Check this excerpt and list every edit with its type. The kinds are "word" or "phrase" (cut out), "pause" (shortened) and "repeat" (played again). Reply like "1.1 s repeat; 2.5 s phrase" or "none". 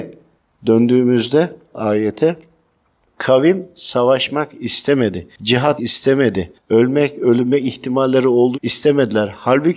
5.8 s word; 8.5 s word